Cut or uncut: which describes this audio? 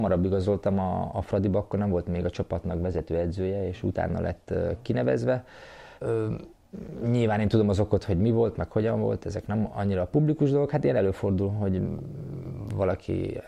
cut